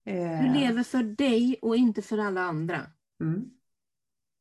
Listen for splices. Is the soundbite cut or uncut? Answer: uncut